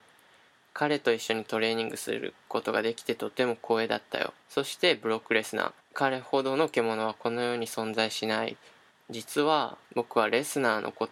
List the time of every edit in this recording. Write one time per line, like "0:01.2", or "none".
0:04.4
0:05.8
0:08.9
0:09.8